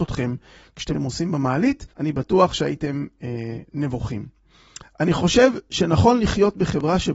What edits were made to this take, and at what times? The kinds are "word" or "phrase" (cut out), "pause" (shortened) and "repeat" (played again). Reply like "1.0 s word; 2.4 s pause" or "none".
0.9 s phrase; 1.9 s pause